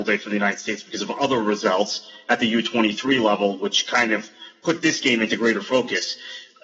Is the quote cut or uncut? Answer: uncut